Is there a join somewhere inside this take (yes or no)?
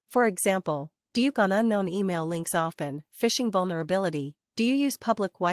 yes